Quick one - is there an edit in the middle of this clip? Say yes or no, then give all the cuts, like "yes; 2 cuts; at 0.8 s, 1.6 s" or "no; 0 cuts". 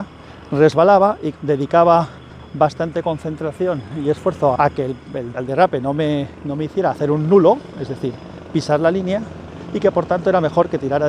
yes; 3 cuts; at 1.3 s, 4.6 s, 5.3 s